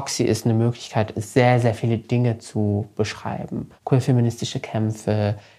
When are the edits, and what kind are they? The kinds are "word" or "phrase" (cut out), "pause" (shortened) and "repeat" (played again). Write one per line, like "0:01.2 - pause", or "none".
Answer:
0:03.8 - pause